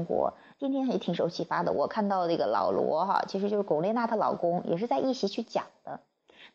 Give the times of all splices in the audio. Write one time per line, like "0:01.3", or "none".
none